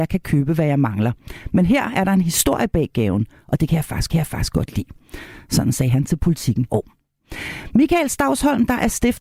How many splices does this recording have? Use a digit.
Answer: 2